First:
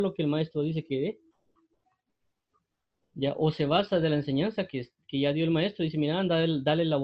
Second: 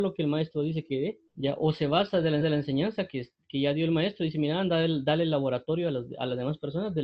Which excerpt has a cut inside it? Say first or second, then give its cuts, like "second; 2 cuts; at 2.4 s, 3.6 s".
second; 2 cuts; at 1.3 s, 2.4 s